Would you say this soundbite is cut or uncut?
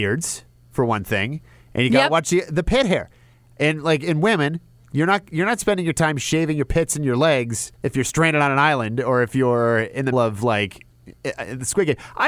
cut